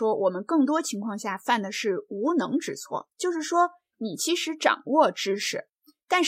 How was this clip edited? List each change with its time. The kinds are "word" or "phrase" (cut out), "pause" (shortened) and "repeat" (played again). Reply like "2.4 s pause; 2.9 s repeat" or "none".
3.1 s pause